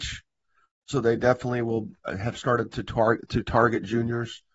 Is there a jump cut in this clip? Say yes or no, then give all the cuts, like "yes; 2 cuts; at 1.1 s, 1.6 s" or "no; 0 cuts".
no; 0 cuts